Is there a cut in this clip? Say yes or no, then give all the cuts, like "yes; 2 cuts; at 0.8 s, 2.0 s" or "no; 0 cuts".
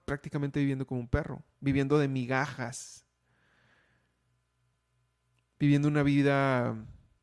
no; 0 cuts